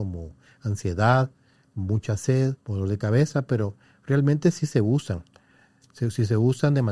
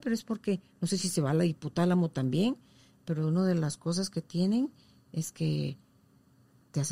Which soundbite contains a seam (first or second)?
first